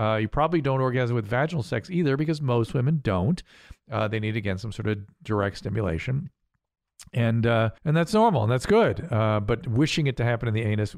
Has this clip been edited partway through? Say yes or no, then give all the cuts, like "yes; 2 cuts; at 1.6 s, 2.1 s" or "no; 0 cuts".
yes; 1 cut; at 7.8 s